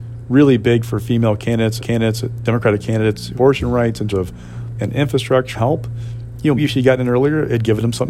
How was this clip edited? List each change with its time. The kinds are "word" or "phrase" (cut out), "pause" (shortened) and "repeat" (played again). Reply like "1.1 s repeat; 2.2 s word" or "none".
1.8 s repeat; 3.4 s word; 4.1 s word; 4.8 s word; 5.5 s word; 6.6 s word